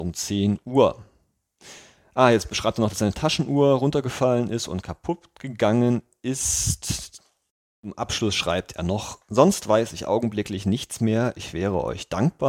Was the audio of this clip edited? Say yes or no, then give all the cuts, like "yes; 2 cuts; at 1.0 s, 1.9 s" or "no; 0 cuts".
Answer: no; 0 cuts